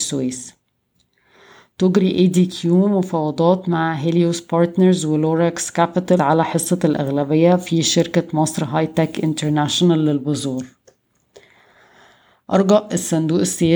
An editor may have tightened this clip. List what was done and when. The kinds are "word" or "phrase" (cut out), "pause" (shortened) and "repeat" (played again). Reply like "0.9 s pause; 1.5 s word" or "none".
6.2 s word